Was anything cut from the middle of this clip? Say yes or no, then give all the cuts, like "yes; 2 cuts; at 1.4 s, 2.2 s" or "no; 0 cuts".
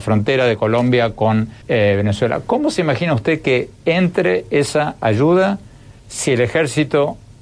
yes; 2 cuts; at 1.6 s, 6.0 s